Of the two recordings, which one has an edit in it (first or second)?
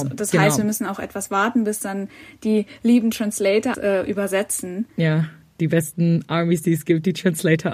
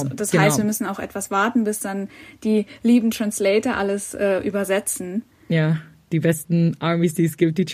first